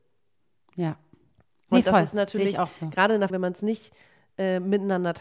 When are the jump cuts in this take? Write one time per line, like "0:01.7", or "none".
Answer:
0:03.3